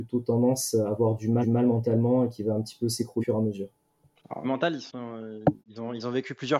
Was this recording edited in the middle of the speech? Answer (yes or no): yes